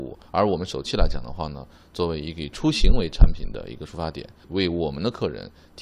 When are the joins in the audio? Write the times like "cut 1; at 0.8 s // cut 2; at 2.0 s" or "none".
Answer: none